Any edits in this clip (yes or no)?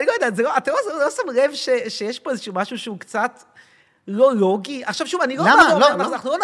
no